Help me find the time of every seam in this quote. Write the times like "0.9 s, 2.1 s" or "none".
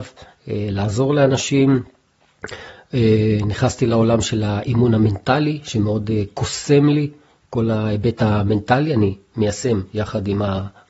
none

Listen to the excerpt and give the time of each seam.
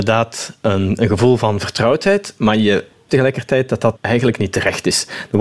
3.1 s, 4.0 s

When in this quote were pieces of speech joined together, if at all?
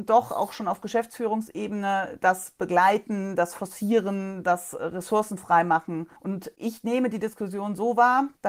6.2 s

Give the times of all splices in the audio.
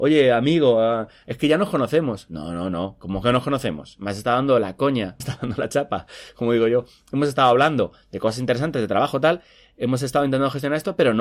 5.2 s

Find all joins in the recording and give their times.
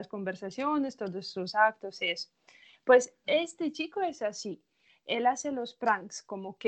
none

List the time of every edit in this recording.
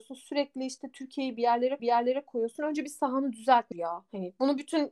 1.8 s, 3.7 s

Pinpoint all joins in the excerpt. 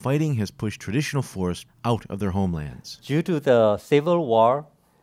1.7 s

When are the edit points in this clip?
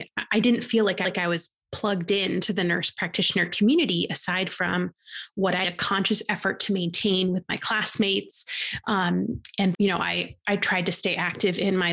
1.0 s, 5.6 s, 9.7 s

